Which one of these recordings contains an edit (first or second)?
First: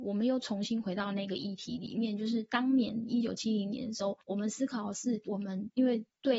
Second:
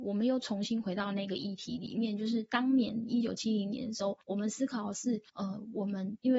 first